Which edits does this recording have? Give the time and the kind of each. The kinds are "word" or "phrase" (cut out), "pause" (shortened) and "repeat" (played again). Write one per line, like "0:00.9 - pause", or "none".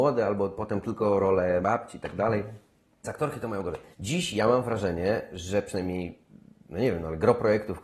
0:01.6 - word
0:03.0 - word
0:03.9 - pause